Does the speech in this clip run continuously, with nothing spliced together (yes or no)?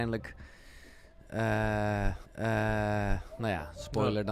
no